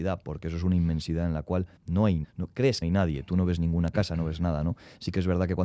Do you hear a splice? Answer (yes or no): yes